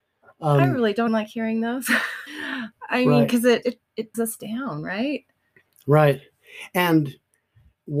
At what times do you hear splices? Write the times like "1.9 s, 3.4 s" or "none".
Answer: 1.1 s, 2.3 s, 3.6 s, 4.1 s